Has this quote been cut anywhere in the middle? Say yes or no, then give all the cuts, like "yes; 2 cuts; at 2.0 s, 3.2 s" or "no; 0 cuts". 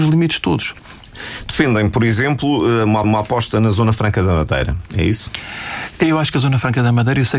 yes; 1 cut; at 3.0 s